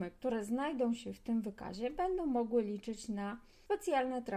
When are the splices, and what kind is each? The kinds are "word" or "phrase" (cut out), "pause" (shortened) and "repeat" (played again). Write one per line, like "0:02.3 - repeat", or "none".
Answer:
none